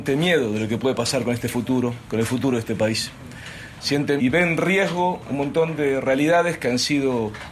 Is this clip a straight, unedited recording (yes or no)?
no